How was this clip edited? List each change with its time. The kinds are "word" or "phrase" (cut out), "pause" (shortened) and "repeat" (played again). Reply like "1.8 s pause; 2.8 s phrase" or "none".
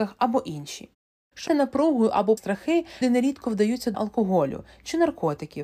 1.5 s word; 2.4 s word; 3.0 s word; 3.9 s word